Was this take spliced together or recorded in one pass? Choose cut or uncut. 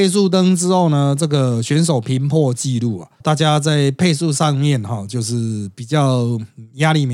cut